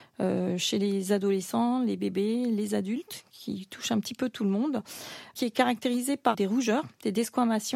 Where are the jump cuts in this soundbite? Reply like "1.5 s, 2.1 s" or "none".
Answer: 6.3 s